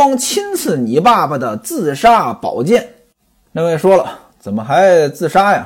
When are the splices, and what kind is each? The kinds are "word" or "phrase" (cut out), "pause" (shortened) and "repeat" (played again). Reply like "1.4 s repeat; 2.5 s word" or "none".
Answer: none